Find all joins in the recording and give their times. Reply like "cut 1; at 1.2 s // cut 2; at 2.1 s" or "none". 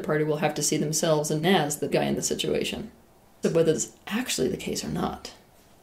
cut 1; at 1.4 s // cut 2; at 1.9 s // cut 3; at 3.4 s // cut 4; at 3.7 s